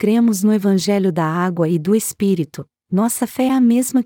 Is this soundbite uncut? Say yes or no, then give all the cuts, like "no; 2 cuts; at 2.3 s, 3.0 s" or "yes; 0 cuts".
yes; 0 cuts